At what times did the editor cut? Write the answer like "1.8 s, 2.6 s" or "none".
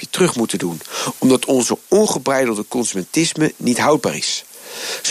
none